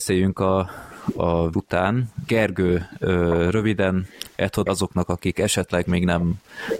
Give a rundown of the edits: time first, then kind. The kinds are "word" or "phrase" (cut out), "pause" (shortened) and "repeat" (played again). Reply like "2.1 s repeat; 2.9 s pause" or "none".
1.5 s word; 2.3 s word; 4.7 s word